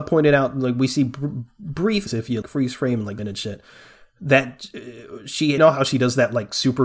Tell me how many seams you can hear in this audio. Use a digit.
4